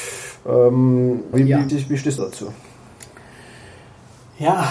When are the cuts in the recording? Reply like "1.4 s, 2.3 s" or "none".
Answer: 1.3 s, 1.7 s, 2.2 s